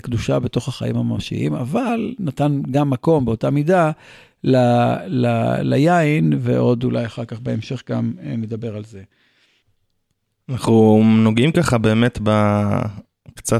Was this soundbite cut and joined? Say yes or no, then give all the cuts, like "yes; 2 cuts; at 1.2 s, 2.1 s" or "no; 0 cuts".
no; 0 cuts